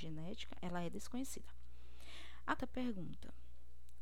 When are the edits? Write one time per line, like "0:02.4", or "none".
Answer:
0:02.6